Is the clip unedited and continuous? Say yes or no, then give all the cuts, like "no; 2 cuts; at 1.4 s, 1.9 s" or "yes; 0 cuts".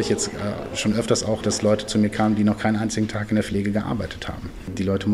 no; 1 cut; at 1.4 s